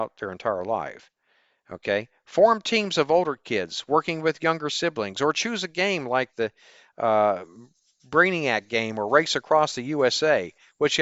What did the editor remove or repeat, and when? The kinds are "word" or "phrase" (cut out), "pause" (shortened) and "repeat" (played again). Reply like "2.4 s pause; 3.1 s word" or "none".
none